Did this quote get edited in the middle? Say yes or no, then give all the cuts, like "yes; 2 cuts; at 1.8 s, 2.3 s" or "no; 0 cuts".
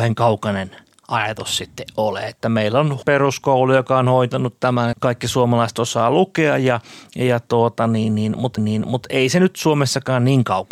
yes; 3 cuts; at 3.0 s, 4.9 s, 8.6 s